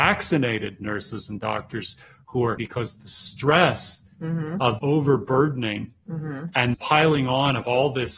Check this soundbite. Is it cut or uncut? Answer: cut